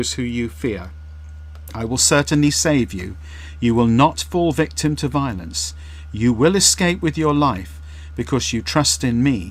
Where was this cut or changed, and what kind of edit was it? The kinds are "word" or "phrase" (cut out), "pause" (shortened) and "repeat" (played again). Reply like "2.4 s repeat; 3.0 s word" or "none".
none

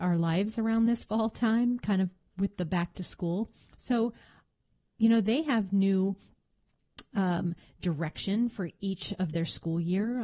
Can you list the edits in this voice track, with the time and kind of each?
none

